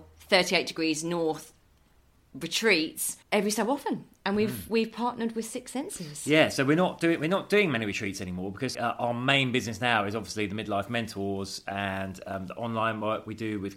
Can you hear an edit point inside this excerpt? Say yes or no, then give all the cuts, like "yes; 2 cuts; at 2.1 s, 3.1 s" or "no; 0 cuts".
yes; 2 cuts; at 3.2 s, 8.7 s